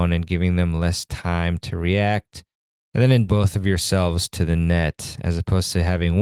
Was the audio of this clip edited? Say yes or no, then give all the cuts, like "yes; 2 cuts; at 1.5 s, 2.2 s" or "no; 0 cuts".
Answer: yes; 1 cut; at 3.3 s